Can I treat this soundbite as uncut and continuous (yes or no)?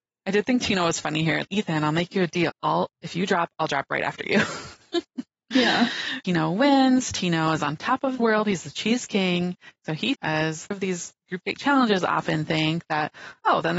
no